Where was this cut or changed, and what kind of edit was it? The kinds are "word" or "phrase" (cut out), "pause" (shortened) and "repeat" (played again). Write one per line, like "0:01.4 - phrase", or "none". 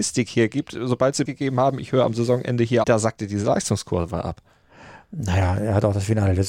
0:01.3 - word
0:02.8 - phrase